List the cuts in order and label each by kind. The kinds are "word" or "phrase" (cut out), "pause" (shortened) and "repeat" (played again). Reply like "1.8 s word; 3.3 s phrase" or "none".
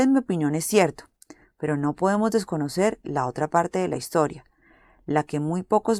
none